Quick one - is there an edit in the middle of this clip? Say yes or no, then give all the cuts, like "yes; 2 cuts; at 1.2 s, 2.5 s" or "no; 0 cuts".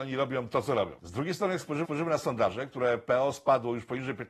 yes; 2 cuts; at 1.0 s, 1.8 s